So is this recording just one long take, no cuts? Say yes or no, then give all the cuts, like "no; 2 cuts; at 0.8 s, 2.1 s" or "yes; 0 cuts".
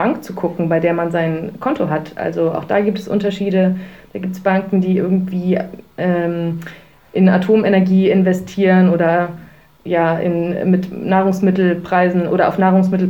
yes; 0 cuts